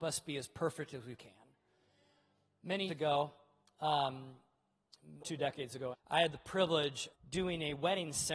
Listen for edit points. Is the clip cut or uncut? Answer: cut